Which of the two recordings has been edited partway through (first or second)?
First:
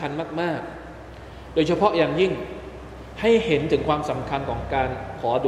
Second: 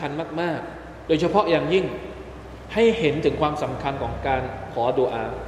second